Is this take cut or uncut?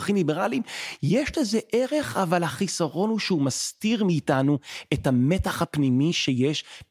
uncut